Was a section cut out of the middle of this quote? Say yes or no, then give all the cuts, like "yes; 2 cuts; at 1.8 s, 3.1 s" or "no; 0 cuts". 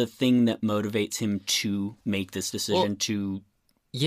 yes; 1 cut; at 2.0 s